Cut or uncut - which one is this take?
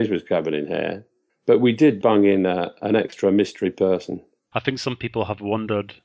uncut